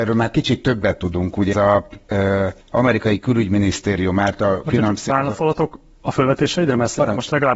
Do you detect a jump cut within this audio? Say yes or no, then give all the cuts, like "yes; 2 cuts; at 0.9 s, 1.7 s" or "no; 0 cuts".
yes; 2 cuts; at 1.5 s, 2.6 s